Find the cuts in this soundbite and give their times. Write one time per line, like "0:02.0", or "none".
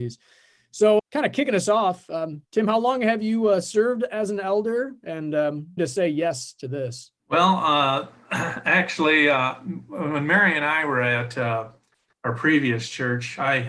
0:01.0
0:02.4
0:05.8
0:07.2